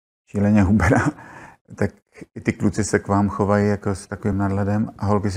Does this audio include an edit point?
no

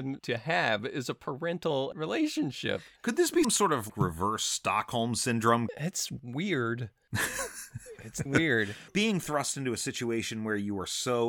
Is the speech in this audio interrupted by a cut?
yes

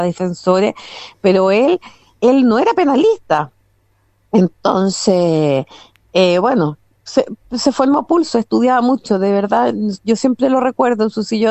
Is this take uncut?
yes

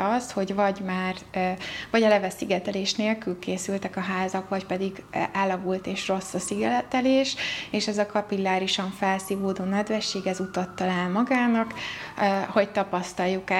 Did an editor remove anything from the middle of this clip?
no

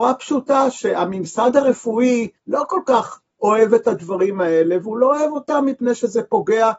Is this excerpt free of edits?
no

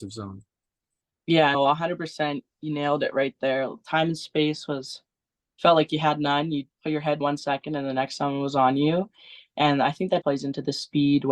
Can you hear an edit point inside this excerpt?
yes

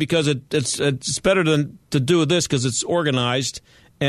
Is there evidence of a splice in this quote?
no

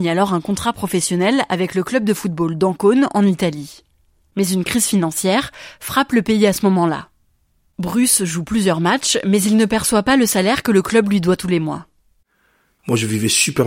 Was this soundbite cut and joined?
no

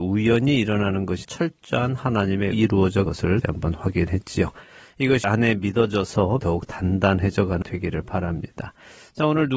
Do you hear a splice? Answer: yes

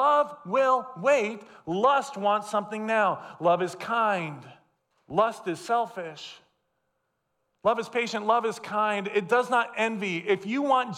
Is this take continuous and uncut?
no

